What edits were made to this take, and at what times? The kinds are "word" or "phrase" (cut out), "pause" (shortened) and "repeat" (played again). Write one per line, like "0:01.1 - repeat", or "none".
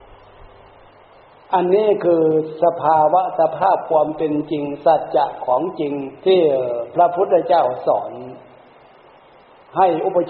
0:06.2 - pause